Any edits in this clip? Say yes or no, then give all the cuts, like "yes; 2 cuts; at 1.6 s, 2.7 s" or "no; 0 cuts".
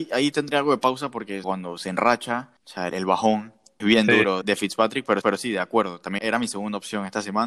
yes; 7 cuts; at 1.4 s, 2.6 s, 2.9 s, 3.8 s, 4.4 s, 5.2 s, 6.2 s